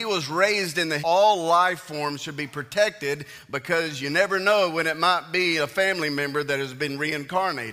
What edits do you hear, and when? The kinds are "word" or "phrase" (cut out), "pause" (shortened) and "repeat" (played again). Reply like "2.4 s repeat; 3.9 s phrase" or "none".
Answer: 1.0 s phrase